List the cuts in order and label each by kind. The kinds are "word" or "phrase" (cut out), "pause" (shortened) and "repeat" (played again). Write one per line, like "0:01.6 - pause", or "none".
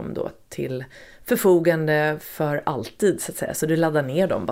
none